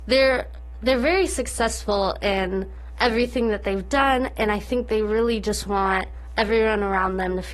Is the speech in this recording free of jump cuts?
yes; 0 cuts

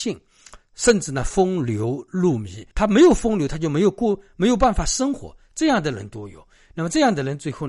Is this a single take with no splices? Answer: no; 1 cut; at 2.7 s

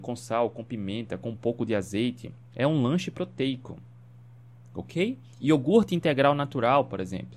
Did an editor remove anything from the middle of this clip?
no; 0 cuts

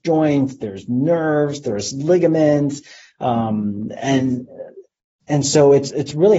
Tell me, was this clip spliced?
no; 0 cuts

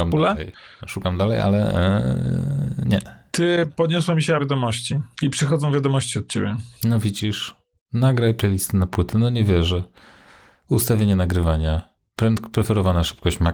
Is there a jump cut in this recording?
yes; 4 cuts; at 4.4 s, 5.1 s, 6.7 s, 7.8 s

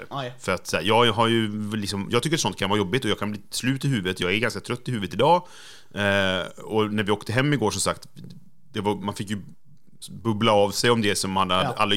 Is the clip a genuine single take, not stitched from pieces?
yes; 0 cuts

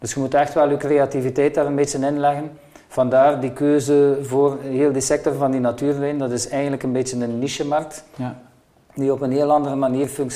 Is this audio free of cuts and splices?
yes; 0 cuts

